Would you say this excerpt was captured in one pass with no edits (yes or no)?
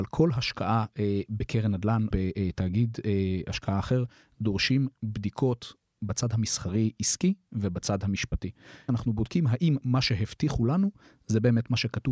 no